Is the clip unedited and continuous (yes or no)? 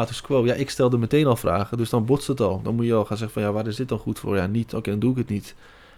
yes